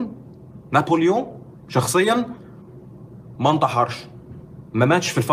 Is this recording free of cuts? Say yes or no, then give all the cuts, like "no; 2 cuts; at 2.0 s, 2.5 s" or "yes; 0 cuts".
yes; 0 cuts